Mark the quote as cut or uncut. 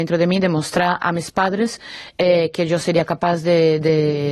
uncut